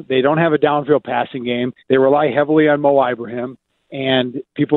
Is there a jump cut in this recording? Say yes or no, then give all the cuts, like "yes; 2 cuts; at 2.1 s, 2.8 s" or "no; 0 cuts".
yes; 2 cuts; at 1.8 s, 3.7 s